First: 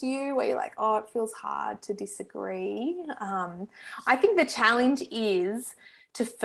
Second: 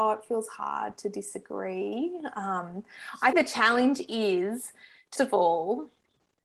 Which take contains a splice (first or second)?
second